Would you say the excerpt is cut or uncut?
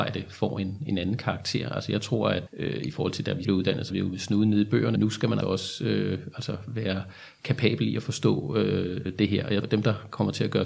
cut